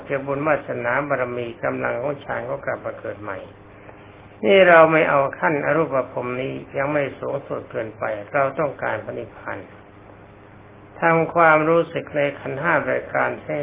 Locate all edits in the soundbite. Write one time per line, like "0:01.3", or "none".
0:04.3